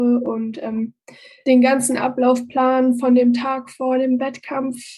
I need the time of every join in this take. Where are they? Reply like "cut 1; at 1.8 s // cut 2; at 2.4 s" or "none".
none